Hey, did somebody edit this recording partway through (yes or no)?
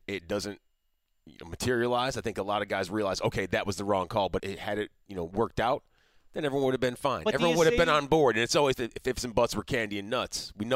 yes